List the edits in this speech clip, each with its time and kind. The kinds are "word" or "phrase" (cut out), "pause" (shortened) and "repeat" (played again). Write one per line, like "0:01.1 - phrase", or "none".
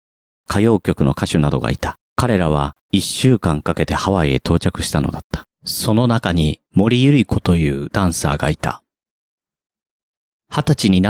0:02.1 - pause
0:02.8 - pause
0:05.5 - pause
0:06.7 - pause